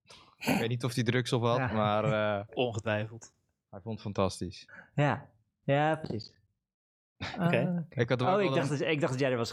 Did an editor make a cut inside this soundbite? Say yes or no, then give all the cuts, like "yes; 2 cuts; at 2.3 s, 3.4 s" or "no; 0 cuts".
no; 0 cuts